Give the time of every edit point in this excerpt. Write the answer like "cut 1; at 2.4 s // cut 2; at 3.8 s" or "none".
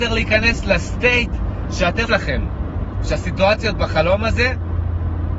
cut 1; at 2.1 s